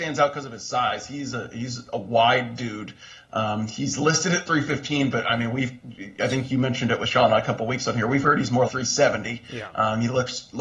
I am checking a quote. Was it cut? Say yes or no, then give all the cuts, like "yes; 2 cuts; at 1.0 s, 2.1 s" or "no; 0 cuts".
yes; 1 cut; at 8.7 s